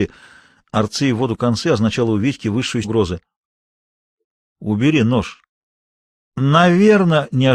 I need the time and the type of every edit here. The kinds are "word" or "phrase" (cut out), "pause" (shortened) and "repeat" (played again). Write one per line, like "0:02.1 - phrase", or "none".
0:02.8 - word